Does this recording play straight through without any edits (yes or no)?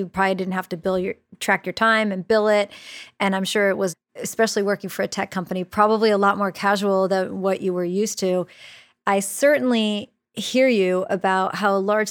yes